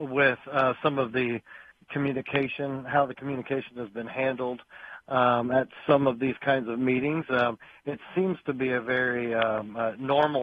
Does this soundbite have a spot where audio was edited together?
no; 0 cuts

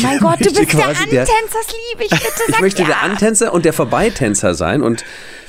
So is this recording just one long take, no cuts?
yes; 0 cuts

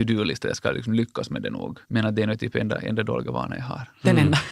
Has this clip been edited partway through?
yes; 1 cut; at 1.8 s

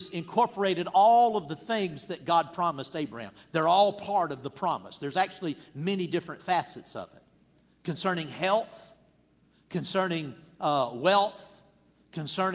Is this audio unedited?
yes; 0 cuts

